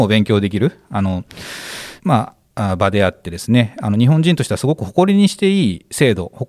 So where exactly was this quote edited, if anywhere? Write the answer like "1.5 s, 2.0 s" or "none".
2.0 s, 2.4 s